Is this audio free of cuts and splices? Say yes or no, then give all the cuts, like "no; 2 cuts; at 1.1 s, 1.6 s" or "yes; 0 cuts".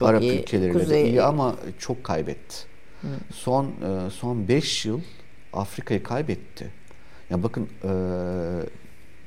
yes; 0 cuts